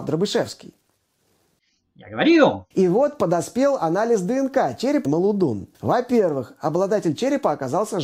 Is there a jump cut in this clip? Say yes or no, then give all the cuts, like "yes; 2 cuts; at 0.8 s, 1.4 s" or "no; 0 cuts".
yes; 3 cuts; at 2.7 s, 5.0 s, 5.7 s